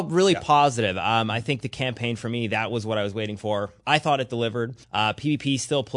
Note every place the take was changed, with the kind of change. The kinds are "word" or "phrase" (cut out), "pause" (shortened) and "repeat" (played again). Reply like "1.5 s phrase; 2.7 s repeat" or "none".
4.8 s pause